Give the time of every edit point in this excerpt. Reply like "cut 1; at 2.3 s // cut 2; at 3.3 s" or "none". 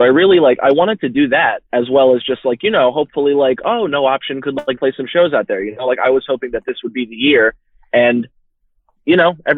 cut 1; at 1.7 s // cut 2; at 4.8 s